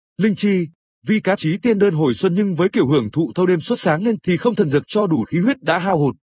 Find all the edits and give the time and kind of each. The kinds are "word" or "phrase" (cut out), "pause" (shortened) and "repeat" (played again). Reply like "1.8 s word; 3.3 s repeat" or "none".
1.4 s word; 4.2 s word; 4.8 s phrase; 5.2 s word